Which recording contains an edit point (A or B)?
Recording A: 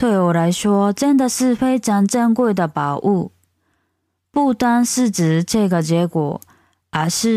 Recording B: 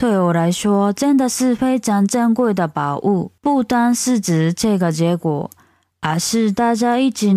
B